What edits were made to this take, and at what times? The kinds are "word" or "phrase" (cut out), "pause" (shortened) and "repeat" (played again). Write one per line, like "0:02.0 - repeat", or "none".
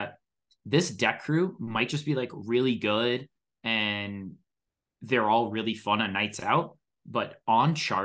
none